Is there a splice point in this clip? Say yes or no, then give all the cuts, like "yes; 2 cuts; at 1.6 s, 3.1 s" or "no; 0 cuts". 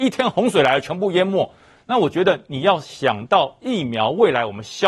no; 0 cuts